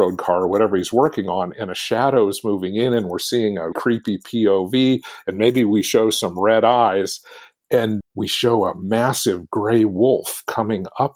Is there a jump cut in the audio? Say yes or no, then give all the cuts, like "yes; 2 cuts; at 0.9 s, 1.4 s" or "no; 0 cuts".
yes; 2 cuts; at 3.7 s, 8.0 s